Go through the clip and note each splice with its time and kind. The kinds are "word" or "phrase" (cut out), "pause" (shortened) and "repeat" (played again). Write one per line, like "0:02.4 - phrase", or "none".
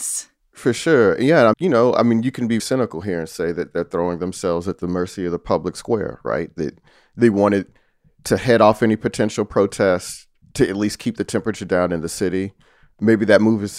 0:01.5 - word
0:02.6 - word